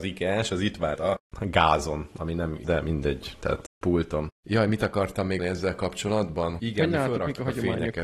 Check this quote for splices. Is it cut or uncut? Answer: cut